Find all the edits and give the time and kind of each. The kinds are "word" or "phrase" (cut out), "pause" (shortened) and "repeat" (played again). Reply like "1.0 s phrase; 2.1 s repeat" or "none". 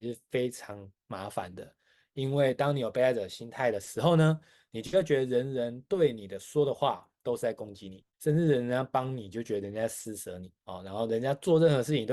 8.1 s pause; 10.6 s pause